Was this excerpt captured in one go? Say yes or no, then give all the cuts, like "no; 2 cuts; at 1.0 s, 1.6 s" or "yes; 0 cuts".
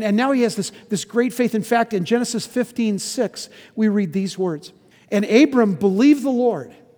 no; 1 cut; at 4.9 s